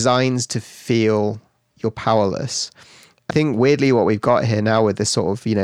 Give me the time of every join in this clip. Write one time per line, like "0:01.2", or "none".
0:01.7
0:03.3